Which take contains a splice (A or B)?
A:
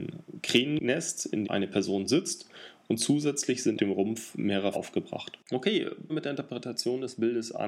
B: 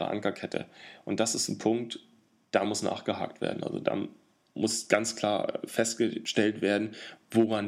A